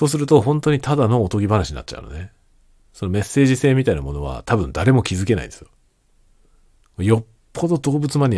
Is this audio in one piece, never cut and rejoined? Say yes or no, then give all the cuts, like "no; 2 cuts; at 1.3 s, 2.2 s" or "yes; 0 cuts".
yes; 0 cuts